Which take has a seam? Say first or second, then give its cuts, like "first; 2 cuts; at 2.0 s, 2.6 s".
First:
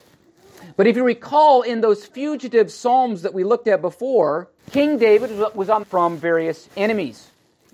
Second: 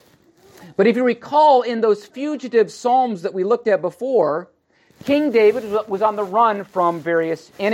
first; 2 cuts; at 4.6 s, 5.8 s